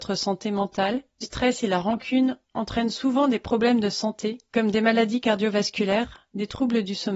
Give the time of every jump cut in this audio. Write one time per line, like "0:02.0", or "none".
0:01.2